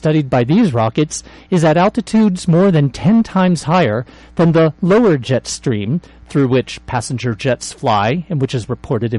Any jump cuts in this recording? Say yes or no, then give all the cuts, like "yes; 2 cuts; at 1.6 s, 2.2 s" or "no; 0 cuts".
no; 0 cuts